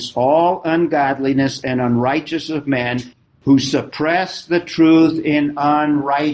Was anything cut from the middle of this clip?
no; 0 cuts

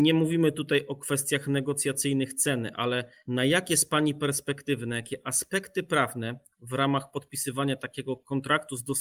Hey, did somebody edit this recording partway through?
no; 0 cuts

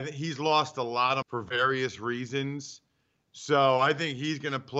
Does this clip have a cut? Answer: yes; 1 cut; at 1.2 s

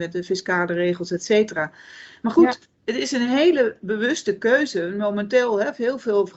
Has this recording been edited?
yes; 1 cut; at 2.7 s

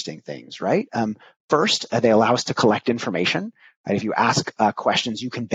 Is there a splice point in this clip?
no; 0 cuts

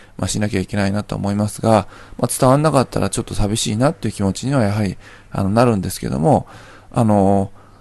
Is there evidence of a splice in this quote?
no; 0 cuts

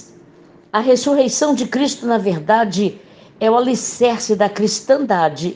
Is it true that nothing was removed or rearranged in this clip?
yes; 0 cuts

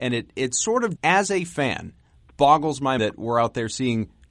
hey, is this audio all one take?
no; 2 cuts; at 1.0 s, 3.0 s

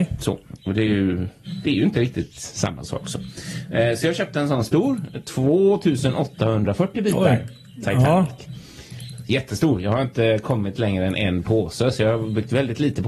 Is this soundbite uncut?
yes; 0 cuts

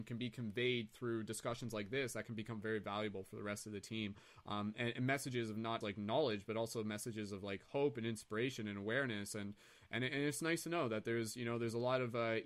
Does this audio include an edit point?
yes; 1 cut; at 5.8 s

